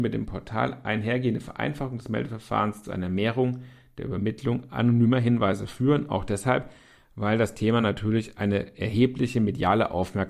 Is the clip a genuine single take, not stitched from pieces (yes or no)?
yes